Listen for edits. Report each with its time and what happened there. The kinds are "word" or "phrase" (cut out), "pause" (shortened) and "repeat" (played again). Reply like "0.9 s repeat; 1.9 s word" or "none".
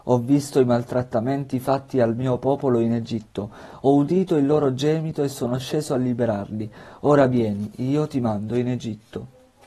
none